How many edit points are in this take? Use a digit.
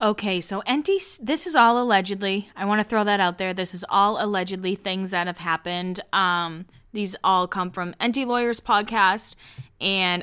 0